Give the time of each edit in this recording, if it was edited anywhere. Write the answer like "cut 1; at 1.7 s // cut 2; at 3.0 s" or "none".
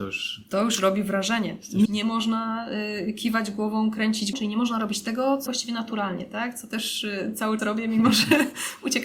cut 1; at 1.8 s // cut 2; at 4.3 s // cut 3; at 5.5 s // cut 4; at 7.6 s

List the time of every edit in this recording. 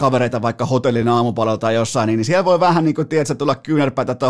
none

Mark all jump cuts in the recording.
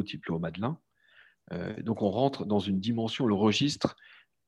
none

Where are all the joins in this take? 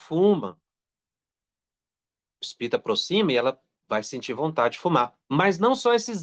none

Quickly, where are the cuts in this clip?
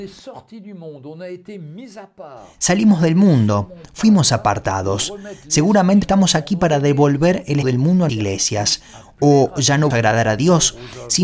cut 1; at 6.0 s // cut 2; at 7.6 s // cut 3; at 8.1 s // cut 4; at 9.9 s

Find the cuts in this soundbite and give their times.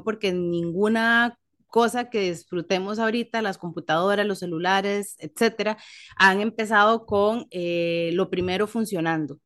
none

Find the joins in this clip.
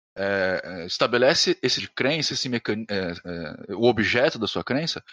cut 1; at 1.8 s // cut 2; at 2.3 s

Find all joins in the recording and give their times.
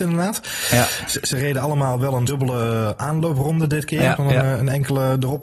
cut 1; at 2.3 s // cut 2; at 4.2 s

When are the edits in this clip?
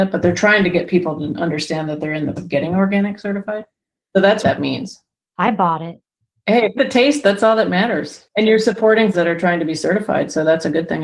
cut 1; at 2.4 s // cut 2; at 4.4 s // cut 3; at 6.8 s // cut 4; at 9.1 s

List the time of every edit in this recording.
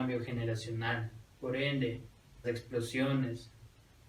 cut 1; at 1.3 s // cut 2; at 2.4 s

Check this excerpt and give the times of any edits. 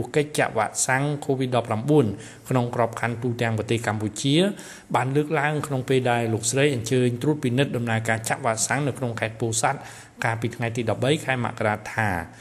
none

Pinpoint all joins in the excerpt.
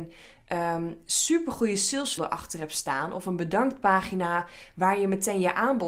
cut 1; at 2.2 s

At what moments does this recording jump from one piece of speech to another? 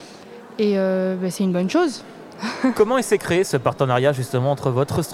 none

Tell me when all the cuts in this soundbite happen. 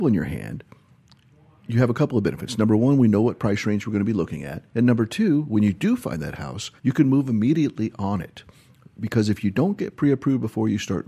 cut 1; at 4.7 s // cut 2; at 6.8 s

